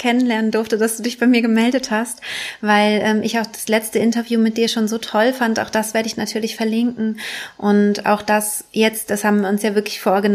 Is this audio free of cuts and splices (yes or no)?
yes